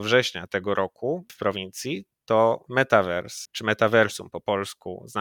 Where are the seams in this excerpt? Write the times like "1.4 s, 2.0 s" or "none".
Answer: 1.3 s, 2.7 s